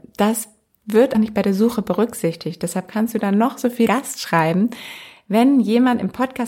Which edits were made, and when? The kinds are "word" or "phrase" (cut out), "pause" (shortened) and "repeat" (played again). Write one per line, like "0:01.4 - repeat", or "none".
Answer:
0:01.1 - word
0:03.9 - phrase

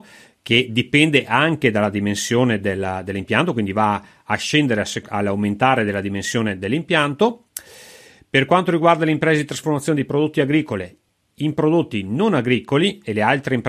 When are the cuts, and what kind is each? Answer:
none

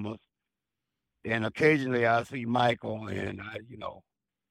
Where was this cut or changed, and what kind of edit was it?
none

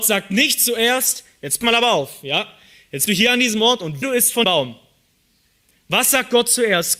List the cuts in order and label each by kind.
0:01.6 - word
0:03.1 - word
0:04.0 - word
0:04.4 - word

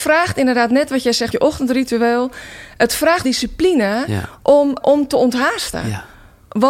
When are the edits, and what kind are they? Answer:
0:01.3 - word
0:03.2 - word
0:04.8 - word

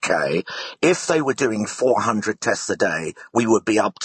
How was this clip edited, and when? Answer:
none

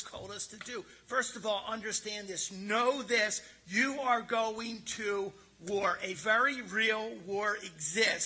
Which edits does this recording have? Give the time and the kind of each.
none

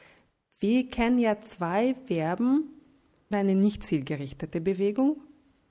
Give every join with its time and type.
0:03.3 - phrase

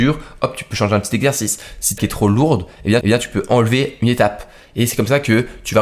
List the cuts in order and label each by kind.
0:02.0 - phrase
0:03.0 - repeat

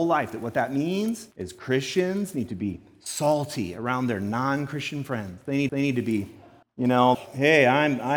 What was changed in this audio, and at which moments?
0:01.3 - pause
0:05.7 - repeat
0:06.6 - pause
0:07.1 - word

